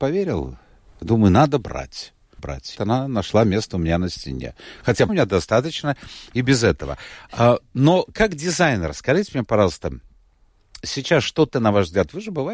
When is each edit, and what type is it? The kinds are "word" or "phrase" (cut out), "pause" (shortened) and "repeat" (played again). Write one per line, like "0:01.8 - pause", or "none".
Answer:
0:02.4 - word
0:02.7 - word
0:05.1 - word
0:10.8 - word
0:11.5 - word